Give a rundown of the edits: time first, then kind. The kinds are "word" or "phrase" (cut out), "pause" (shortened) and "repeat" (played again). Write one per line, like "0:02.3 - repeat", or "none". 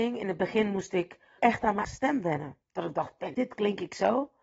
0:01.4 - word
0:01.8 - word
0:02.6 - pause
0:03.3 - word